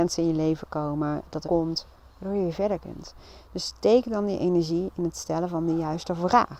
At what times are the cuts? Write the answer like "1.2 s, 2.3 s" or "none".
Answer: 1.4 s